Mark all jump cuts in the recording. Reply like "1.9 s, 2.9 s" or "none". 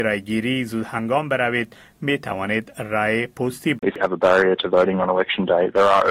3.8 s